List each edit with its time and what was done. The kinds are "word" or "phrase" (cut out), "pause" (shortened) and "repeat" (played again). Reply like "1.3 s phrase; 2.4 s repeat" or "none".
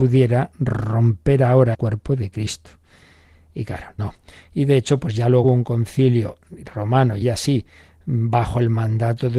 1.7 s word; 4.0 s word; 5.4 s word; 7.2 s word